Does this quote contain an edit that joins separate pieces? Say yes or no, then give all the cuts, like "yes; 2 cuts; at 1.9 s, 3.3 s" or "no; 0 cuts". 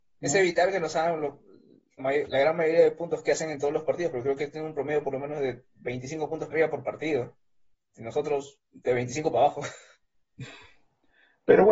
yes; 3 cuts; at 2.0 s, 6.5 s, 8.6 s